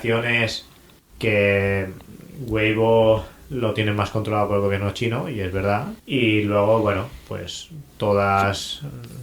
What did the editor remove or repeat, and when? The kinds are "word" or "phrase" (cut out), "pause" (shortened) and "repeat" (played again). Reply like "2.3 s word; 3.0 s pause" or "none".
1.0 s pause; 6.0 s pause